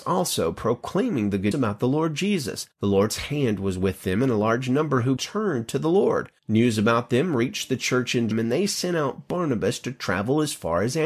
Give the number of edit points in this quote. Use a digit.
5